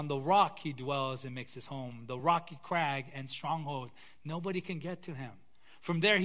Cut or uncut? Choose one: uncut